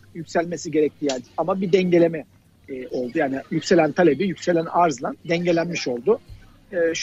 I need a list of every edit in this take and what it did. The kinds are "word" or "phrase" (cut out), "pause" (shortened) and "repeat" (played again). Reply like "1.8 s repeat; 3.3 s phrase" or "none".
1.2 s phrase; 5.2 s pause